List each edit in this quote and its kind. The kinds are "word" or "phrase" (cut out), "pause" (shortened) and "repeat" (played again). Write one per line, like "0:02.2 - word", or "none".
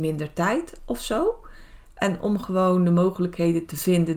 none